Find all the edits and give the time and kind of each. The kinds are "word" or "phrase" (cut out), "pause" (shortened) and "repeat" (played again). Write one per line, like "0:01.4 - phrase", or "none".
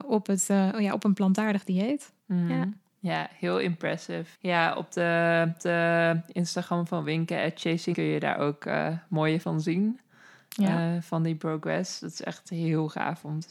0:02.2 - pause
0:04.3 - pause
0:05.6 - repeat
0:07.9 - word
0:09.4 - word